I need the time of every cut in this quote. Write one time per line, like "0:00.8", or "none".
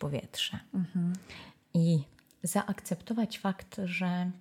none